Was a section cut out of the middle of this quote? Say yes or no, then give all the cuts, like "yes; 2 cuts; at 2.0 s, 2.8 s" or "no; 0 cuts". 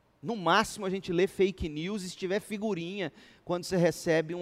no; 0 cuts